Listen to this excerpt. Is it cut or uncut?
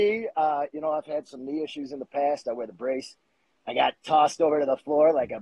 uncut